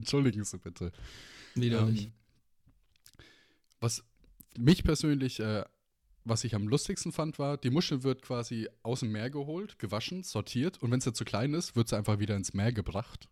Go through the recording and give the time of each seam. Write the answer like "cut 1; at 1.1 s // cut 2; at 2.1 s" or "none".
none